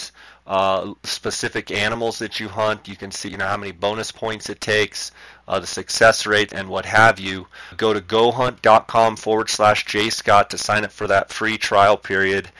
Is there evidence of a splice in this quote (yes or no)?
yes